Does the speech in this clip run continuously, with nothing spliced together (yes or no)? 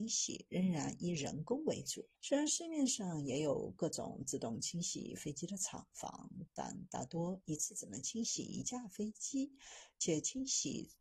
no